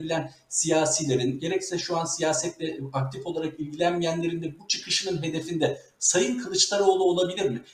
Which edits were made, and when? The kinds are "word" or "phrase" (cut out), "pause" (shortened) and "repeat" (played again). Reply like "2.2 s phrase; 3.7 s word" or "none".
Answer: none